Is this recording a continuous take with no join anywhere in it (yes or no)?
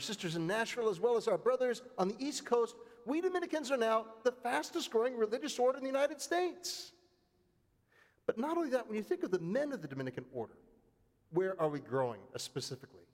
yes